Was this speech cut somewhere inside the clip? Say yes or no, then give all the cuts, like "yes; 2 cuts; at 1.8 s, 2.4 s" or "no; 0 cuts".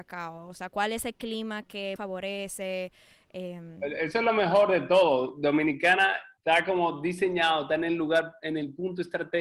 yes; 2 cuts; at 2.0 s, 6.4 s